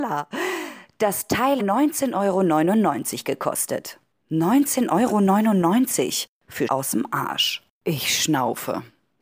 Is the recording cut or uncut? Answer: cut